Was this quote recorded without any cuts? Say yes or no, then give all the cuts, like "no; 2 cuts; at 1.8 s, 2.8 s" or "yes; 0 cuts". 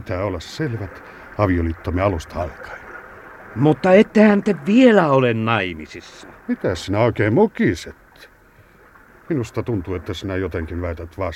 no; 1 cut; at 6.4 s